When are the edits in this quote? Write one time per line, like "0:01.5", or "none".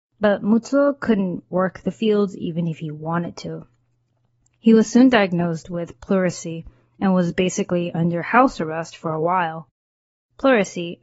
none

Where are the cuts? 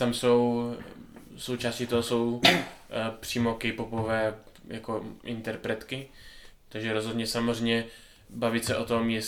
0:06.5

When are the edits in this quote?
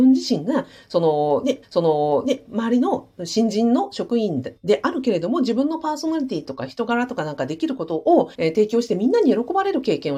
0:01.6
0:08.3

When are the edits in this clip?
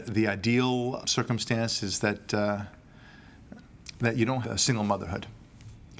0:01.0
0:03.6
0:04.4

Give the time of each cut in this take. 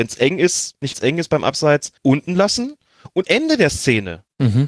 0:00.9
0:02.0
0:03.2

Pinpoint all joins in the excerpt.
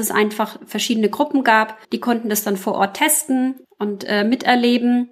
0:01.8

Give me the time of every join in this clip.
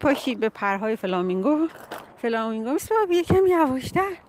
0:02.1
0:02.8

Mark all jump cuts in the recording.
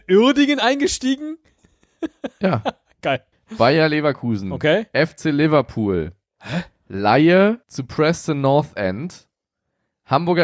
0:03.3
0:07.6

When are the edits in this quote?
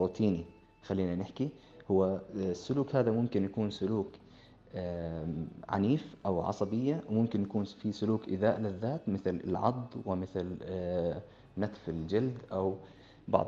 none

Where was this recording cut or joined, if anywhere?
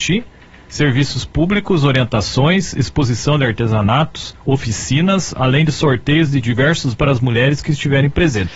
0:04.4
0:06.9

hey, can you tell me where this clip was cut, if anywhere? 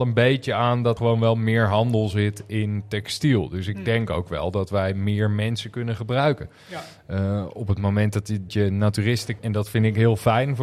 0:01.0
0:08.5
0:09.4

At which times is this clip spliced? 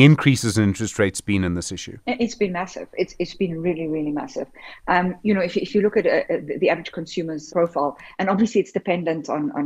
0:02.0
0:07.5

